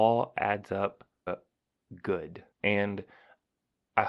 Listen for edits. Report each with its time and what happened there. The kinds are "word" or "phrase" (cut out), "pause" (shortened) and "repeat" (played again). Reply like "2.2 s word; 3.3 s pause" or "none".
1.3 s word; 2.5 s pause